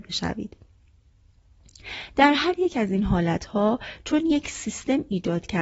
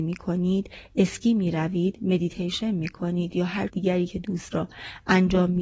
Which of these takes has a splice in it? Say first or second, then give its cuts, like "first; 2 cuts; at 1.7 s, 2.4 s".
second; 2 cuts; at 3.7 s, 4.5 s